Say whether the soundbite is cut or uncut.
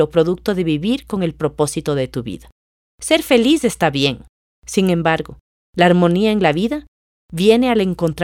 uncut